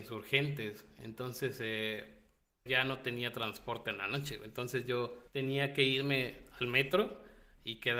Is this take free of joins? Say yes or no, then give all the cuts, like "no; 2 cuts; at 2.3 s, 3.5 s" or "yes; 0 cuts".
no; 2 cuts; at 2.7 s, 5.3 s